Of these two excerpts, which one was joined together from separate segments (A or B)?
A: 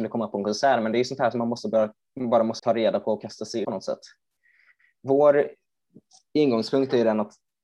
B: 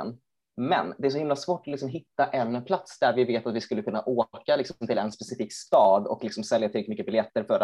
A